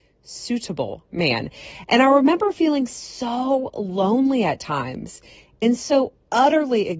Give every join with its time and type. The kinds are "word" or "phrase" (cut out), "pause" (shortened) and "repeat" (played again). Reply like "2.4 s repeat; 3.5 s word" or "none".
none